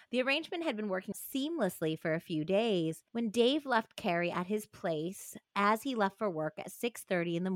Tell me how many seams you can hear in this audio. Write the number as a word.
two